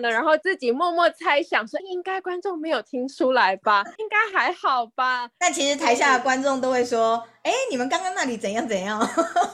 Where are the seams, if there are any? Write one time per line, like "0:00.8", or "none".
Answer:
0:01.8
0:03.9